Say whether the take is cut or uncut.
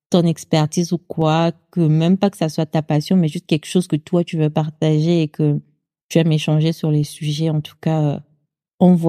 uncut